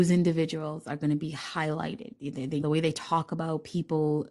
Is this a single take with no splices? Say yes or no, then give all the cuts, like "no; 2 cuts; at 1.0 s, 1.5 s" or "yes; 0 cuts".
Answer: no; 1 cut; at 2.6 s